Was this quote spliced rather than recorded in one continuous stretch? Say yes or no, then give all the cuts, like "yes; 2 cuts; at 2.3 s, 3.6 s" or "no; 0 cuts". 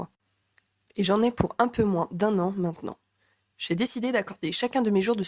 no; 0 cuts